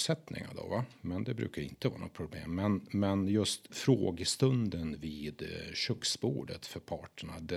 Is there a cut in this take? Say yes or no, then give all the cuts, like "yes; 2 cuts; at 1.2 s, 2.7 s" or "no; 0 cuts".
yes; 1 cut; at 3.7 s